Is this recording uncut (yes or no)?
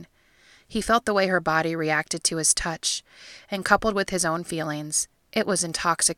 yes